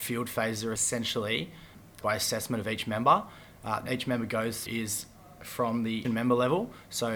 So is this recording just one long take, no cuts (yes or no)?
no